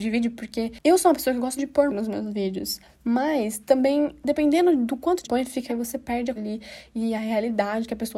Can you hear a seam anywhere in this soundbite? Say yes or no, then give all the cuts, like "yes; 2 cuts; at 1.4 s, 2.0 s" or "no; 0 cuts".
yes; 5 cuts; at 1.6 s, 1.9 s, 5.2 s, 5.7 s, 6.4 s